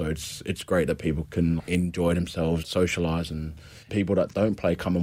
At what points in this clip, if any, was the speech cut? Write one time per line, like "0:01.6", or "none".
0:01.2
0:01.6
0:02.6
0:03.9